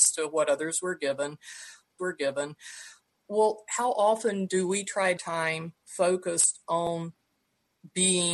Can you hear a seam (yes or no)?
yes